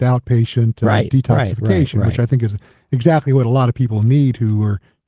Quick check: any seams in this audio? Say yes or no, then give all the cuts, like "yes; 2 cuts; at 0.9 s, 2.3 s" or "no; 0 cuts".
no; 0 cuts